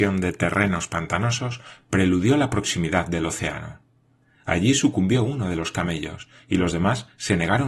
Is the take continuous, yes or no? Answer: yes